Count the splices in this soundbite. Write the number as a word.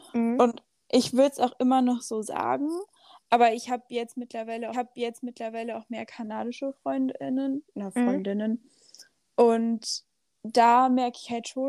one